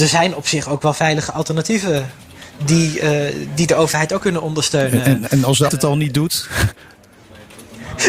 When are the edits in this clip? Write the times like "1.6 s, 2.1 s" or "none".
4.2 s, 5.7 s